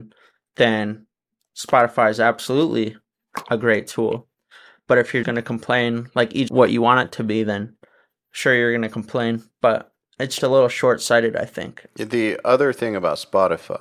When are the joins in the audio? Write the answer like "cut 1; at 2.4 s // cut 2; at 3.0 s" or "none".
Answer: cut 1; at 5.2 s // cut 2; at 6.5 s // cut 3; at 10.4 s